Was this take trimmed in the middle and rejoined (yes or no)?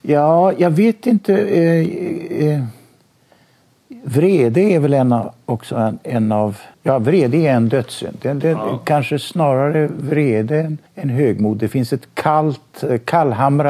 yes